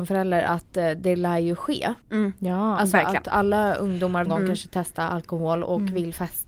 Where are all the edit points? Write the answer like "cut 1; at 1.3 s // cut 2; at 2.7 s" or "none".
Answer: cut 1; at 2.0 s // cut 2; at 4.3 s

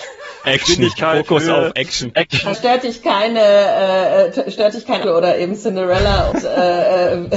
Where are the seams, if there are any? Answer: cut 1; at 2.5 s // cut 2; at 5.0 s // cut 3; at 6.3 s

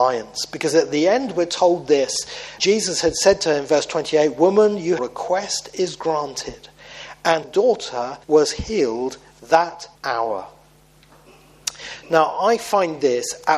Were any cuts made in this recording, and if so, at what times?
cut 1; at 2.6 s // cut 2; at 5.0 s // cut 3; at 7.4 s // cut 4; at 8.2 s // cut 5; at 9.9 s

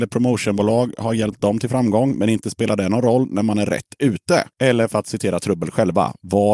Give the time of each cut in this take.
none

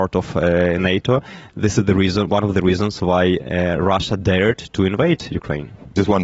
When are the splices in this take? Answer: none

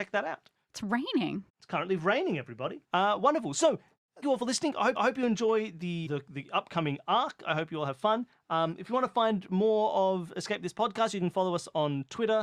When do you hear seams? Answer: cut 1; at 1.5 s // cut 2; at 2.8 s // cut 3; at 4.2 s // cut 4; at 5.0 s // cut 5; at 6.1 s

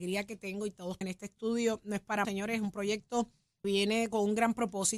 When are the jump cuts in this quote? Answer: cut 1; at 1.0 s // cut 2; at 2.2 s // cut 3; at 3.6 s

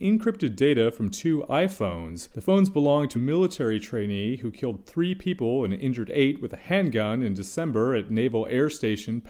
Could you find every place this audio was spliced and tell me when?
cut 1; at 2.3 s // cut 2; at 3.1 s

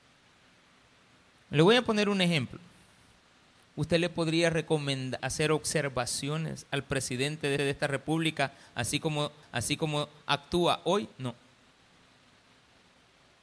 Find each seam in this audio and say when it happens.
cut 1; at 5.2 s // cut 2; at 7.6 s // cut 3; at 9.4 s // cut 4; at 11.1 s

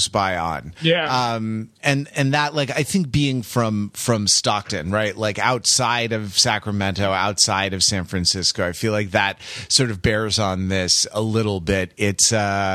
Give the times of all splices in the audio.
cut 1; at 1.8 s

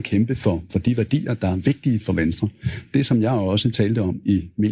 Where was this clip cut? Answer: none

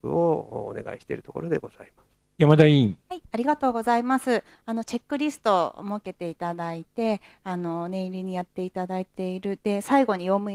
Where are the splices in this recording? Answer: cut 1; at 2.2 s // cut 2; at 3.0 s

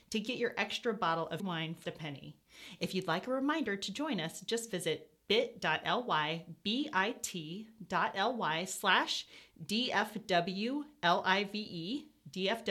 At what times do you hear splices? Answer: cut 1; at 1.4 s // cut 2; at 1.8 s

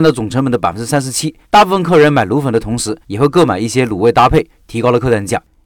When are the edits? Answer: cut 1; at 1.4 s // cut 2; at 3.0 s

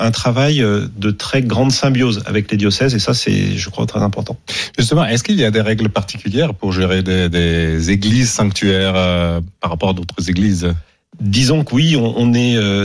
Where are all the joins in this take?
cut 1; at 9.6 s // cut 2; at 10.9 s

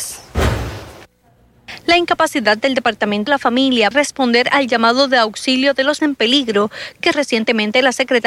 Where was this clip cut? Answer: cut 1; at 3.3 s // cut 2; at 3.9 s // cut 3; at 6.0 s // cut 4; at 7.1 s

